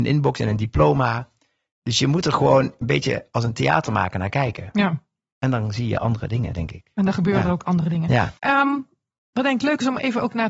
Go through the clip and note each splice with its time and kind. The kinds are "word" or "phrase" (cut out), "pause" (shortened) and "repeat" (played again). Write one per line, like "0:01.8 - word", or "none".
0:08.4 - pause